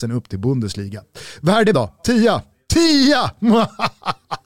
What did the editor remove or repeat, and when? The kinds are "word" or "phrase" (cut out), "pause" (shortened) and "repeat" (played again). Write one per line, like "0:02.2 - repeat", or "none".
0:01.7 - word